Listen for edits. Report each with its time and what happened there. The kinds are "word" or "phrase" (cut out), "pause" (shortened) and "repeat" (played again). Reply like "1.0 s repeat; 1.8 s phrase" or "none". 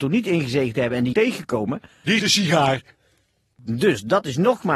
1.1 s word; 2.2 s word

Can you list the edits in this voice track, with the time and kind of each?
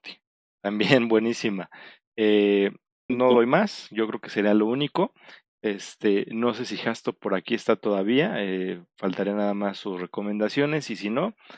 3.1 s word

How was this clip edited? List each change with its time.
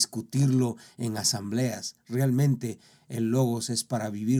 none

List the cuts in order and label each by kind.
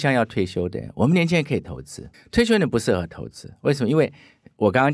2.1 s pause

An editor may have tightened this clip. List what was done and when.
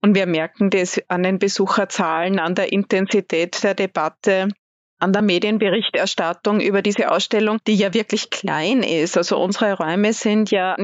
none

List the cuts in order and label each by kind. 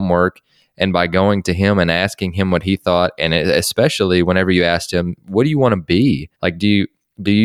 6.3 s pause

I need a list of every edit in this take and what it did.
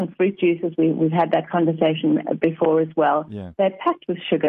none

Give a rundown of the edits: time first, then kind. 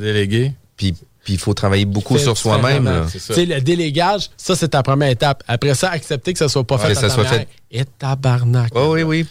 none

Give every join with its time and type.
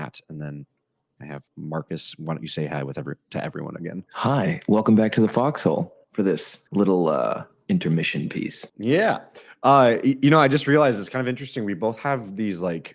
1.5 s pause; 4.1 s pause; 6.0 s pause; 6.7 s pause; 8.7 s pause

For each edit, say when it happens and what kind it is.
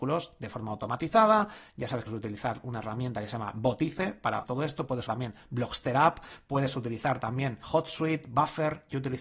2.1 s word; 4.4 s word; 5.1 s word; 7.6 s word

